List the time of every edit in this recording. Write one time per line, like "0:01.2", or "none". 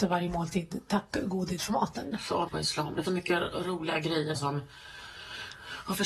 0:01.6
0:02.5
0:03.0
0:04.3